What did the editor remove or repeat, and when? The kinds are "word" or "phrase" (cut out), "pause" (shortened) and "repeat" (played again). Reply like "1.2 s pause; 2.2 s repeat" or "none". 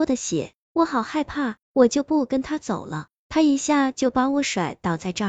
1.6 s pause